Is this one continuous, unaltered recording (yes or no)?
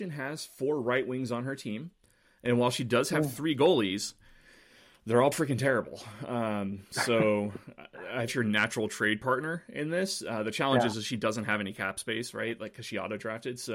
no